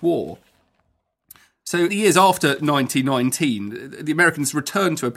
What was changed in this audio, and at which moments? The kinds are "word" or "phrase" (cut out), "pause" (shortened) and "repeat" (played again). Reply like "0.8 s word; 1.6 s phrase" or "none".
1.9 s word